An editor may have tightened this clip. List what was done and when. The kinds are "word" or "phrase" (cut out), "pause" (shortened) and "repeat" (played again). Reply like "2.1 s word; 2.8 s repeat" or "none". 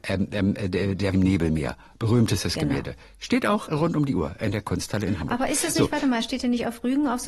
1.1 s phrase; 3.7 s word

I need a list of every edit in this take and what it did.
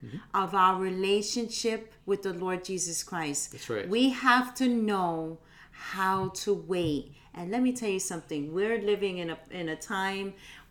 2.0 s pause

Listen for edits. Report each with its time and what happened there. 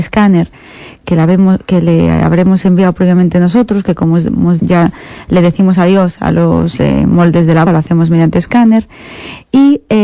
1.0 s word; 4.6 s phrase; 6.8 s word; 7.7 s word

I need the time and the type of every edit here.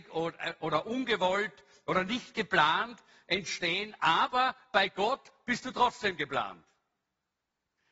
none

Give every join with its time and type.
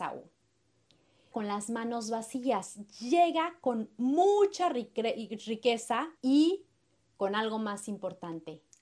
1.3 s phrase; 6.2 s pause

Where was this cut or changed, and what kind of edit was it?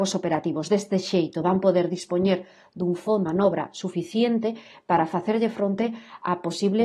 3.3 s word

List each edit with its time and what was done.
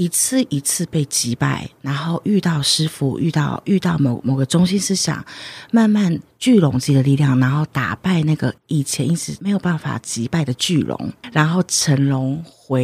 8.6 s pause

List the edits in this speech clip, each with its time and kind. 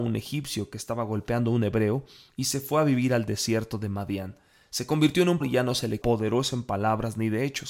5.4 s word; 6.0 s word

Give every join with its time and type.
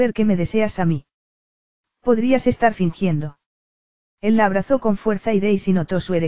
none

